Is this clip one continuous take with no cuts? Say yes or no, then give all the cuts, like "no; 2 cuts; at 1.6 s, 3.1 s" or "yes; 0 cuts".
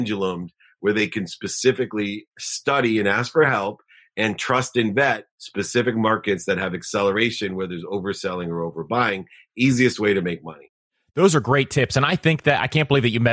yes; 0 cuts